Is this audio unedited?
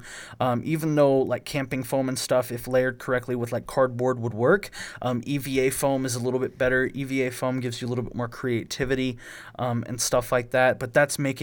yes; 0 cuts

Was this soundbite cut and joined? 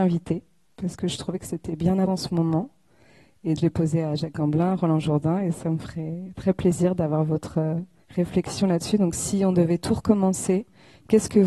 yes; 3 cuts; at 2.1 s, 3.6 s, 8.0 s

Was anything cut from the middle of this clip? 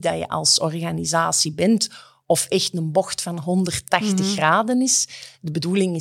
no; 0 cuts

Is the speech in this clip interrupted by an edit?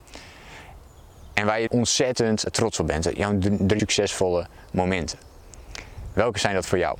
yes; 3 cuts; at 1.7 s, 2.5 s, 3.8 s

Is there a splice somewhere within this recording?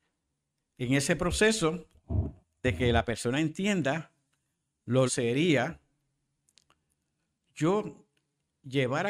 yes; 2 cuts; at 2.4 s, 5.1 s

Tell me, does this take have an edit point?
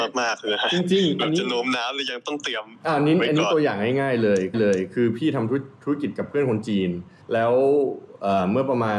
yes; 2 cuts; at 4.5 s, 7.2 s

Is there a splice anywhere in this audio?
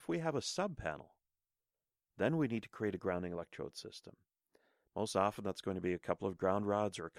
no; 0 cuts

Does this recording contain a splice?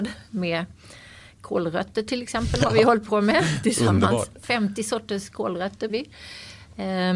yes; 1 cut; at 5.9 s

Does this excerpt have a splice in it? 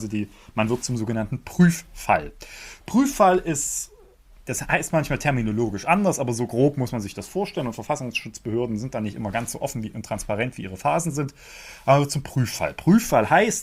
no; 0 cuts

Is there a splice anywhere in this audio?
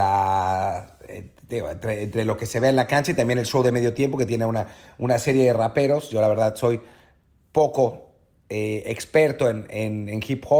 no; 0 cuts

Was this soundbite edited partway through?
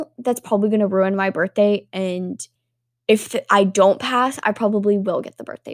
no; 0 cuts

